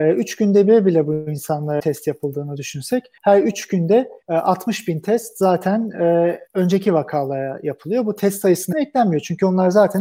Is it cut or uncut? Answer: cut